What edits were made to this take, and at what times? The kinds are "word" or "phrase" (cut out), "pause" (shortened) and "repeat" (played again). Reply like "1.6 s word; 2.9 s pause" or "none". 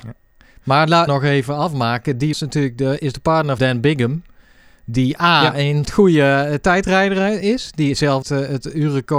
1.1 s word; 2.3 s word; 3.6 s word; 5.8 s word; 8.2 s word